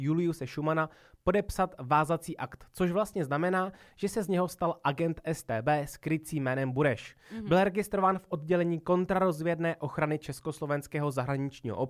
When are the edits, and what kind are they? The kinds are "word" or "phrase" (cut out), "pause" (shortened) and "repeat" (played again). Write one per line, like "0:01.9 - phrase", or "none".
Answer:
none